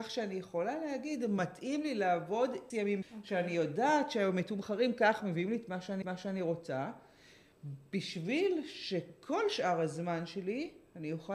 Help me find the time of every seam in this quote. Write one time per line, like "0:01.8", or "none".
0:02.7
0:03.0
0:05.2
0:06.0